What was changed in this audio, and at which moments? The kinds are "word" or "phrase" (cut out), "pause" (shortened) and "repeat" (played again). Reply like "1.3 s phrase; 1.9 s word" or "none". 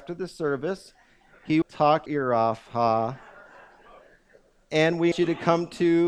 1.6 s word; 2.1 s word; 5.1 s word